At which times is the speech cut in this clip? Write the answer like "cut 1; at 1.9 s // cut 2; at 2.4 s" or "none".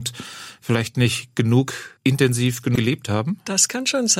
cut 1; at 2.0 s // cut 2; at 2.8 s